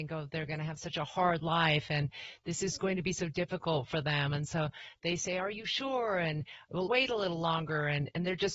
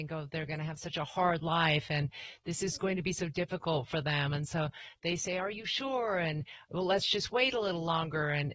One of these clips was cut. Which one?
first; 1 cut; at 6.9 s

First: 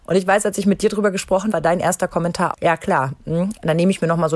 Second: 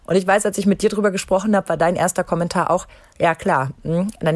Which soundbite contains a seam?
first; 2 cuts; at 1.5 s, 2.5 s

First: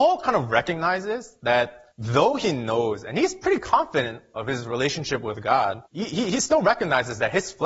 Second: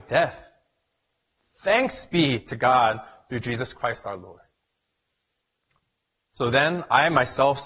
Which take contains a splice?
first; 2 cuts; at 1.9 s, 5.9 s

